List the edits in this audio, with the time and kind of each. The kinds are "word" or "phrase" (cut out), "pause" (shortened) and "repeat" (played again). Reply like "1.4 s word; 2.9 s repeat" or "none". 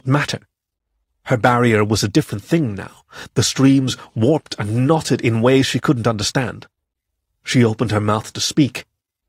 none